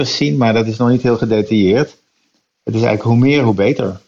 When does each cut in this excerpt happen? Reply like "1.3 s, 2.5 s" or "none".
none